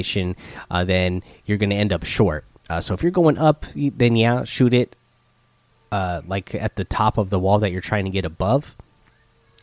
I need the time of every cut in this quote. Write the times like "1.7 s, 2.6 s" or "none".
none